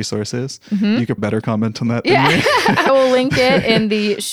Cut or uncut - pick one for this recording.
cut